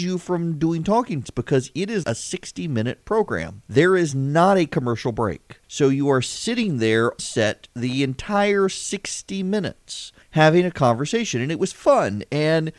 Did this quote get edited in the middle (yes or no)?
yes